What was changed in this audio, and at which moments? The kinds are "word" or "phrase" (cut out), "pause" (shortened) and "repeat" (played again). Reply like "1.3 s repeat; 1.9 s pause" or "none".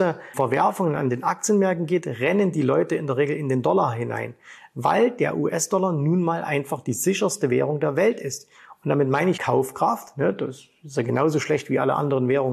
9.4 s phrase

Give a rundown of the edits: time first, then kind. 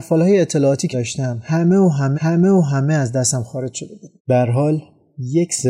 0.9 s word; 2.1 s repeat; 4.2 s pause

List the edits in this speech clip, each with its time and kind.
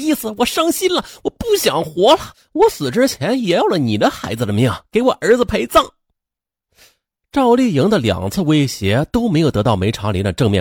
none

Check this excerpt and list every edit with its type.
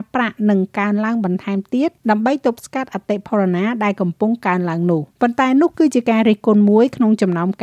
2.0 s pause; 5.1 s pause

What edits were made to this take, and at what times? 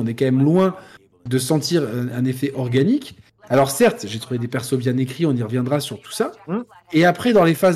none

